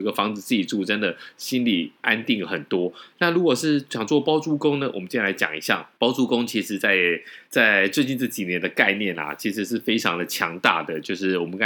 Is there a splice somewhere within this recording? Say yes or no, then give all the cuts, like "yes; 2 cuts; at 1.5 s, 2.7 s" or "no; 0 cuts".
yes; 2 cuts; at 5.9 s, 7.4 s